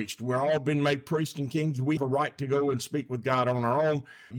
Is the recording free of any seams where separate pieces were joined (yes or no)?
no